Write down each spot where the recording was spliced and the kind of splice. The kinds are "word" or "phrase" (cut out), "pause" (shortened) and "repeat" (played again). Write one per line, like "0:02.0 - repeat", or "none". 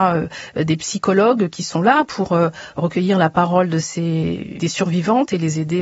0:04.6 - word